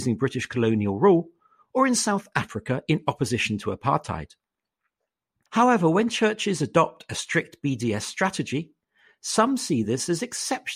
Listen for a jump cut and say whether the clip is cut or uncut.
uncut